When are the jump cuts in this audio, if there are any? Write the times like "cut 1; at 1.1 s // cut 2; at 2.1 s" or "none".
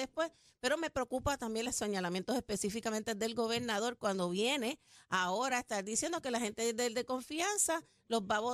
none